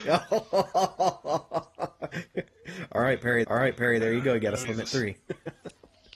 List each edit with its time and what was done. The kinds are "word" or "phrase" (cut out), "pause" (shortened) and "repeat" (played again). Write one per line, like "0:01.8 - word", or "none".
0:03.4 - repeat
0:04.6 - word